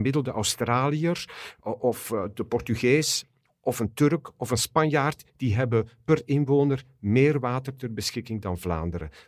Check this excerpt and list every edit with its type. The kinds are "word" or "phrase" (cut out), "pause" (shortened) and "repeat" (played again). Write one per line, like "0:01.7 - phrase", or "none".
none